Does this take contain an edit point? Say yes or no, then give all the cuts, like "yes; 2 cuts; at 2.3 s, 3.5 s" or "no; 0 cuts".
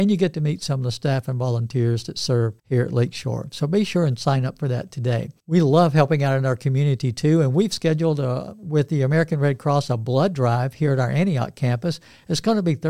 yes; 2 cuts; at 2.6 s, 5.4 s